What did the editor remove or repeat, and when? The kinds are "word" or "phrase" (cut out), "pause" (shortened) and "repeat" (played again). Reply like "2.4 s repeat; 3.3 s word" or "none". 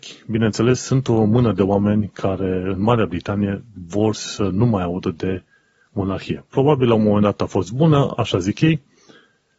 none

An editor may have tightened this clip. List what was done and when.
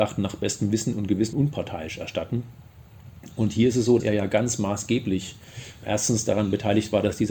1.3 s word; 4.0 s word

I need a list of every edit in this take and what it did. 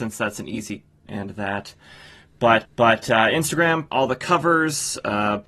1.1 s phrase; 2.6 s repeat; 3.9 s word

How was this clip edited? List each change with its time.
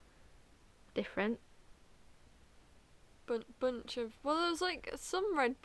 none

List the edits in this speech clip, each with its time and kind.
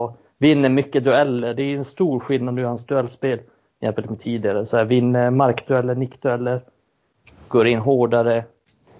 none

